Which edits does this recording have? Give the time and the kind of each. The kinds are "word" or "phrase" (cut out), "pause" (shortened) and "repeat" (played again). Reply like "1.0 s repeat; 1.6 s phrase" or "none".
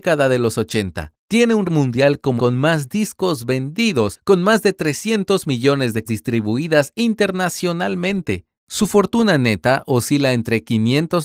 1.2 s pause; 1.6 s word; 2.4 s phrase; 6.1 s word